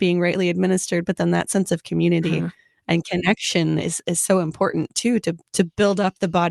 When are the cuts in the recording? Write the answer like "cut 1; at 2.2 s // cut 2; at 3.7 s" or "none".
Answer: none